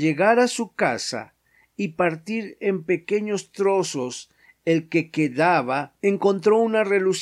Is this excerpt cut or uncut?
uncut